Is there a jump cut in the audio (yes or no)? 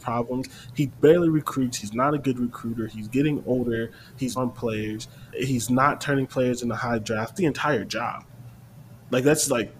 yes